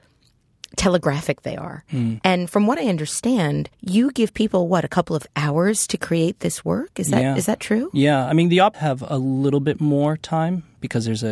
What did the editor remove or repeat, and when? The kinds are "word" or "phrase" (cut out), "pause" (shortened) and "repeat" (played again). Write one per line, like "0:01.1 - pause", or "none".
0:03.7 - pause
0:08.7 - word